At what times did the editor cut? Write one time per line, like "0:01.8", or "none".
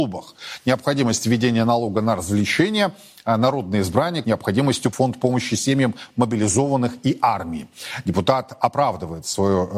0:04.2
0:04.9